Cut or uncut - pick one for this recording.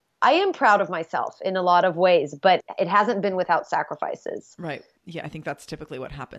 uncut